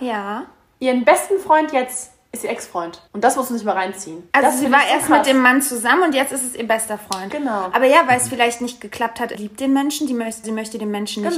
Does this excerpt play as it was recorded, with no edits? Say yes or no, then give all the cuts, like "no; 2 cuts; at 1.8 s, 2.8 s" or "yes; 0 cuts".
no; 3 cuts; at 3.1 s, 9.3 s, 10.4 s